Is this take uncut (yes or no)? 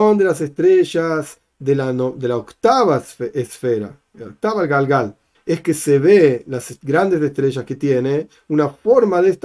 no